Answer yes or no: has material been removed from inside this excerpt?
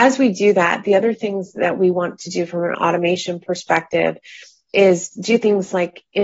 no